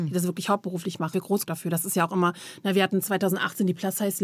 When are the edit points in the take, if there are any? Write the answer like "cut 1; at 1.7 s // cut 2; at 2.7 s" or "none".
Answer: cut 1; at 1.1 s // cut 2; at 1.5 s